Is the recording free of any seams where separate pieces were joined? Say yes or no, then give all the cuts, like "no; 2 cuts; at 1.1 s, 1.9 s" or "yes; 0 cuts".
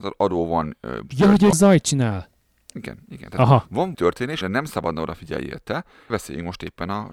no; 5 cuts; at 1.1 s, 1.5 s, 3.9 s, 4.4 s, 6.1 s